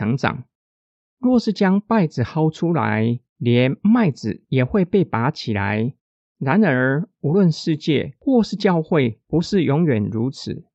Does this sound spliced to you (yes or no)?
yes